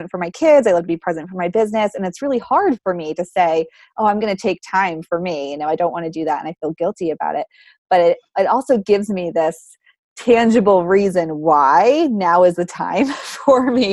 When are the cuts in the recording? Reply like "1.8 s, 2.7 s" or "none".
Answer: none